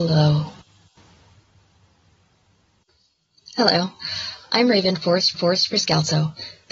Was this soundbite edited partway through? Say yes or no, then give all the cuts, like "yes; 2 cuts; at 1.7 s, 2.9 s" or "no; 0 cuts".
yes; 1 cut; at 5.3 s